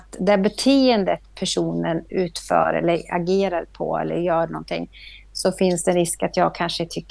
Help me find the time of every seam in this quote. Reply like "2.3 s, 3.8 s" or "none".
none